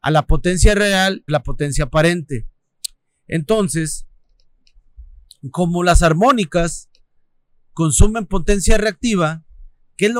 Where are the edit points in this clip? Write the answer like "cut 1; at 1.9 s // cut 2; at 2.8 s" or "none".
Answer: cut 1; at 1.3 s